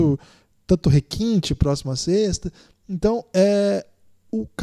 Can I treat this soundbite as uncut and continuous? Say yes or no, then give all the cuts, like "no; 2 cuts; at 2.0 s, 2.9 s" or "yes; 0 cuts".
yes; 0 cuts